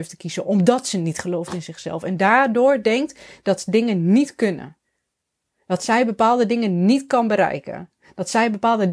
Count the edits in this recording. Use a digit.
0